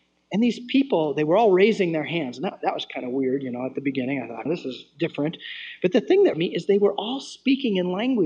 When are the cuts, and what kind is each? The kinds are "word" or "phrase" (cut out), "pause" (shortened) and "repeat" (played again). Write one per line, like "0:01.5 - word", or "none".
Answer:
0:04.5 - word
0:06.3 - phrase

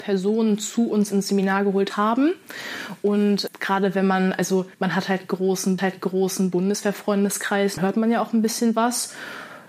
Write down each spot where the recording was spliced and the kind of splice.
0:01.9 - phrase
0:03.5 - word
0:04.7 - pause
0:05.8 - repeat
0:07.8 - word

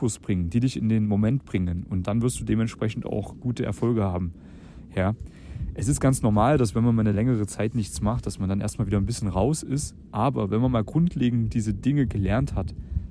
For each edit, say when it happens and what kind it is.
none

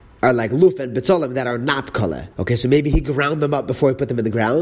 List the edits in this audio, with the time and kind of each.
0:02.3 - pause

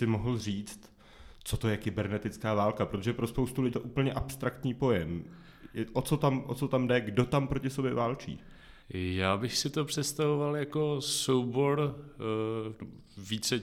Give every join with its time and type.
0:03.7 - word
0:08.8 - pause

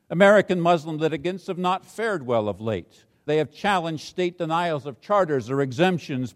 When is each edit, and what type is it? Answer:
0:03.3 - word

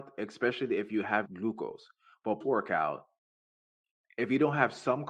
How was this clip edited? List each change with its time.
0:01.2 - word
0:02.4 - word

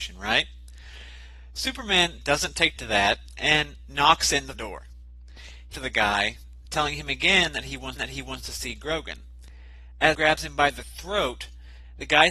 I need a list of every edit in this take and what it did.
0:02.2 - word
0:02.8 - phrase
0:04.5 - word
0:05.7 - phrase
0:08.0 - repeat
0:10.1 - word

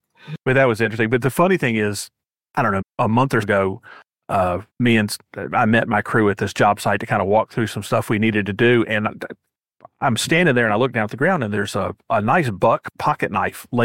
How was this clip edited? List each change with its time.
0:02.8 - word
0:03.4 - word
0:04.7 - pause

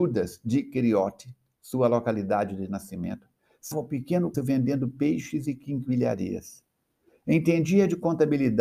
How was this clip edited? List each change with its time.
0:03.7 - word
0:04.3 - word

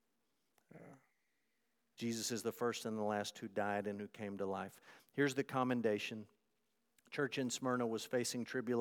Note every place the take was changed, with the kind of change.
none

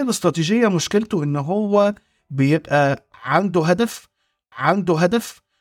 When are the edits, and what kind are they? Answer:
0:04.5 - repeat

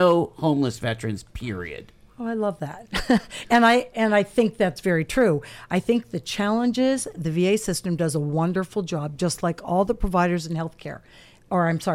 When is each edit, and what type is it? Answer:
none

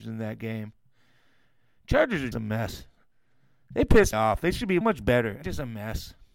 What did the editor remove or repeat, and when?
0:02.3 - word
0:04.1 - word
0:04.8 - word
0:05.4 - word

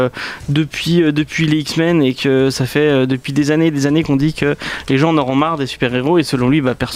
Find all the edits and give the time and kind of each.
none

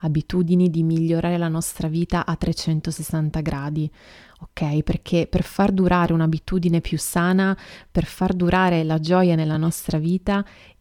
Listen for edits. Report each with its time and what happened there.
none

